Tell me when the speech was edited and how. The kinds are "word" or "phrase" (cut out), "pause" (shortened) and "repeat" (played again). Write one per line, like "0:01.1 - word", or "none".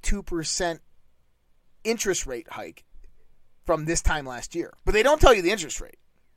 0:04.8 - pause